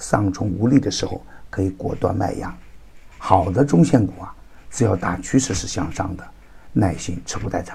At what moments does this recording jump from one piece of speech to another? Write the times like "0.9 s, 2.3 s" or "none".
3.1 s